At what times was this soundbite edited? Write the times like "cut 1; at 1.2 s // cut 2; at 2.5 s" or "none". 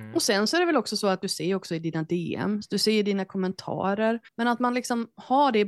cut 1; at 4.3 s